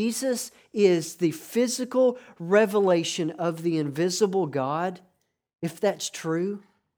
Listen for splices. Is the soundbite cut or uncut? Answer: uncut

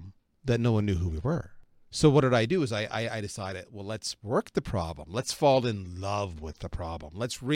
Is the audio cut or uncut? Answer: uncut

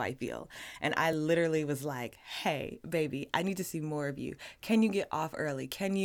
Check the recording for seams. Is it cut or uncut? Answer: uncut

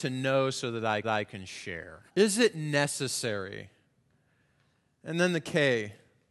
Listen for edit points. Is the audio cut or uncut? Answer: cut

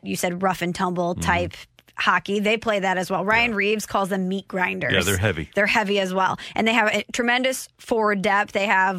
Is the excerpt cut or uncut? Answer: uncut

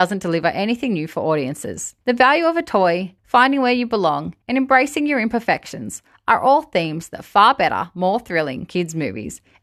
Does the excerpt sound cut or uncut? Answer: cut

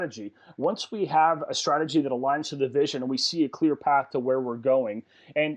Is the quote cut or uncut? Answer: uncut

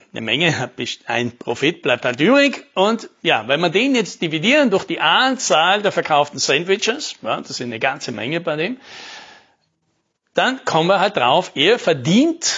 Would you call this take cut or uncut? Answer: uncut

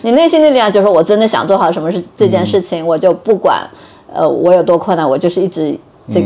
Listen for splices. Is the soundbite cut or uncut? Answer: uncut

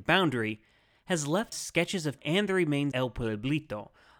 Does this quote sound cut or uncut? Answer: cut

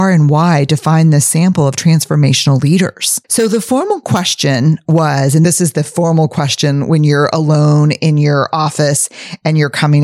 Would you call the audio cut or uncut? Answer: cut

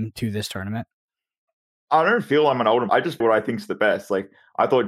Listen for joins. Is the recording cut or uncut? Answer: cut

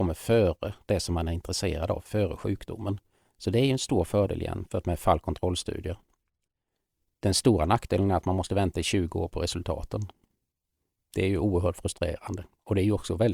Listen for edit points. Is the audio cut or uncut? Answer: uncut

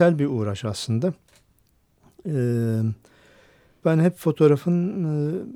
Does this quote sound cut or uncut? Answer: cut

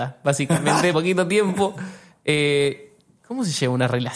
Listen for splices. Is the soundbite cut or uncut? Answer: cut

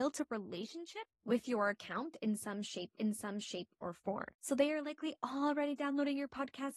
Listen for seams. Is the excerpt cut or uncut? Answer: cut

